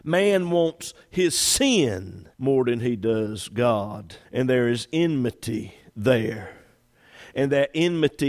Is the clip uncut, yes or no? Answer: no